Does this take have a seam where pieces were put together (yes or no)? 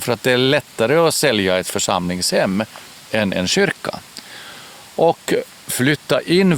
no